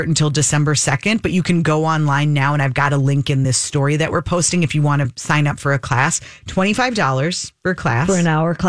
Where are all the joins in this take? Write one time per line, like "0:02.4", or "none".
none